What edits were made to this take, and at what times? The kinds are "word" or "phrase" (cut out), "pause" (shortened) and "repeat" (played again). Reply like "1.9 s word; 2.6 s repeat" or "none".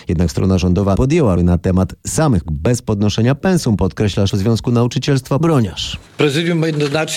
1.0 s word; 1.4 s word; 2.5 s word; 4.3 s word; 5.4 s phrase; 6.1 s pause